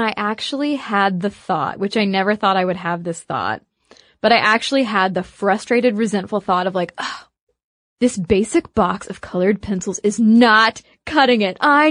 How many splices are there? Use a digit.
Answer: 0